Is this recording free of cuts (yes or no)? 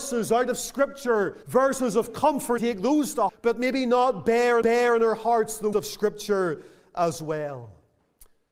no